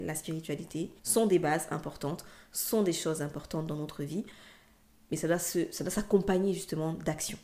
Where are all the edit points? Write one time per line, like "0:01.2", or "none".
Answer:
0:01.0